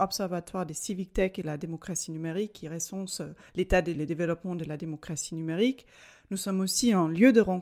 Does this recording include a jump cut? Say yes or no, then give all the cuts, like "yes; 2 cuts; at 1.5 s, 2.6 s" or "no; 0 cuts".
yes; 2 cuts; at 3.5 s, 3.9 s